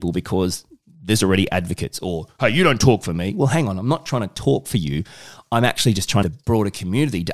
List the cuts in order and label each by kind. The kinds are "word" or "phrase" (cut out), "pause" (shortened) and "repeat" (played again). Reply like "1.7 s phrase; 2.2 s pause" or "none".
6.2 s phrase